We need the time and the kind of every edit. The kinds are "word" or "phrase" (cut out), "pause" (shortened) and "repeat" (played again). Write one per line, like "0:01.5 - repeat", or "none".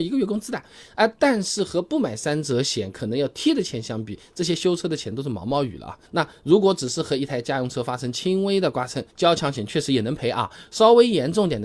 0:06.1 - pause
0:09.1 - pause